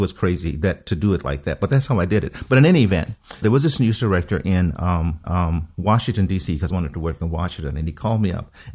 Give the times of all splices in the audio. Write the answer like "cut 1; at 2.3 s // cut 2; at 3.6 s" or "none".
cut 1; at 3.4 s // cut 2; at 5.2 s // cut 3; at 6.7 s